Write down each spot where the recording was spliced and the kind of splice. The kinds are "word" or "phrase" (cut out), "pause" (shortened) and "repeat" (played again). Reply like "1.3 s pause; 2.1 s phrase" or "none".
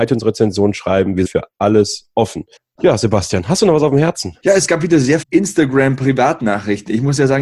1.2 s word; 2.6 s pause; 4.4 s pause; 5.2 s word